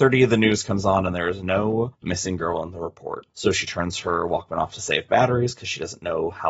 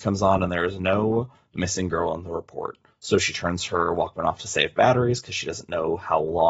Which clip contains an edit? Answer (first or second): first